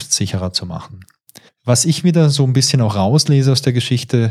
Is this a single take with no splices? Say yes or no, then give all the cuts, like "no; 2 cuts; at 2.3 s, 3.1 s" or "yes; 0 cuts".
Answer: no; 1 cut; at 1.5 s